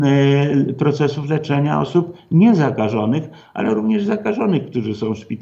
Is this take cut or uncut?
uncut